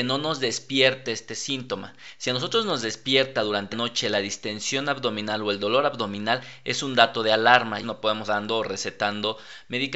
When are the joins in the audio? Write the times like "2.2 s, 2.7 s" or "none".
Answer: 3.7 s, 7.8 s, 8.2 s